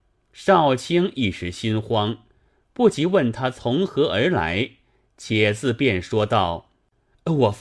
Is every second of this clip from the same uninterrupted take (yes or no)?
yes